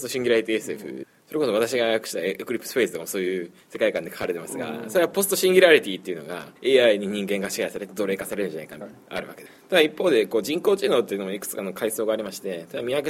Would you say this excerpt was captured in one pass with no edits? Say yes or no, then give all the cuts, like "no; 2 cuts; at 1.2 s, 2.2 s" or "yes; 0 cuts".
no; 1 cut; at 6.6 s